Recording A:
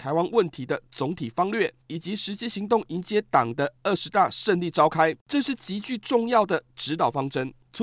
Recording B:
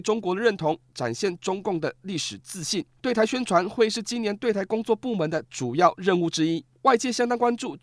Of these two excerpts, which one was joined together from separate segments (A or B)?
A